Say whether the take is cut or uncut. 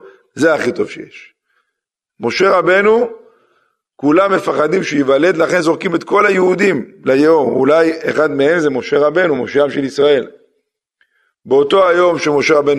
uncut